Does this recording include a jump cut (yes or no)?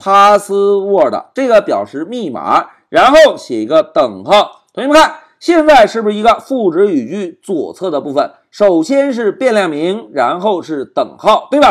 no